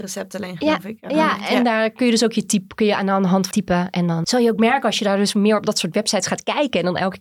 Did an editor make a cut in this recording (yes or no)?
yes